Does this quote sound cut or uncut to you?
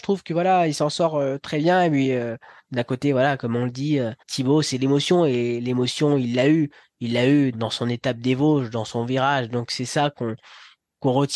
cut